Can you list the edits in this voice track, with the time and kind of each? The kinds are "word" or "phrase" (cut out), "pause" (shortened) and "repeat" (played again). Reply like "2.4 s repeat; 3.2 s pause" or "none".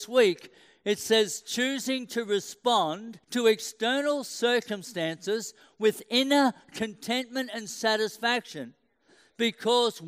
3.2 s pause